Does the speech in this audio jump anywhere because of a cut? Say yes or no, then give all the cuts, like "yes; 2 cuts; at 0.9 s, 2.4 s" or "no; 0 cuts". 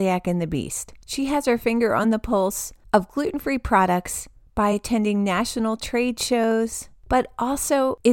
no; 0 cuts